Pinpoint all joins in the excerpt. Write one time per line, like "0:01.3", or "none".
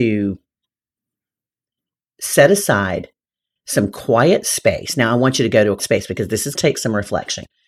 0:05.8
0:06.5